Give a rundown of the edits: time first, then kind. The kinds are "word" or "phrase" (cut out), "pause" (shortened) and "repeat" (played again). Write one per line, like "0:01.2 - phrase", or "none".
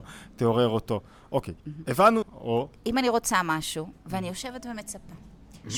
0:01.6 - pause
0:02.2 - word